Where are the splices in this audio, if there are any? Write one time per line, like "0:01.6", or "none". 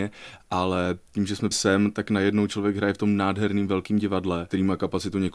0:01.5